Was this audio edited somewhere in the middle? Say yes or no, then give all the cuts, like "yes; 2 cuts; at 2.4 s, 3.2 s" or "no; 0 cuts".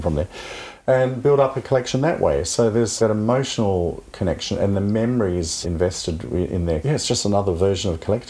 yes; 3 cuts; at 3.0 s, 5.6 s, 6.8 s